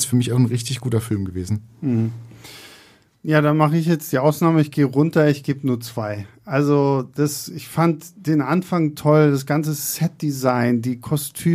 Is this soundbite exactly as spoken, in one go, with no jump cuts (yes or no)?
yes